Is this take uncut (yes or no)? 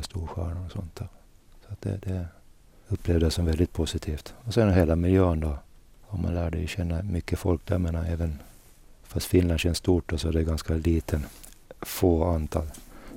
yes